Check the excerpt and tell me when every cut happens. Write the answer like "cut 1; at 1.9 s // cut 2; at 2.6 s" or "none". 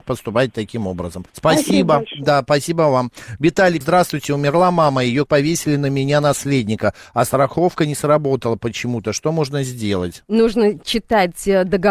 cut 1; at 1.3 s // cut 2; at 3.8 s // cut 3; at 5.3 s